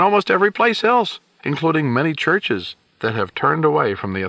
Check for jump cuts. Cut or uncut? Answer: uncut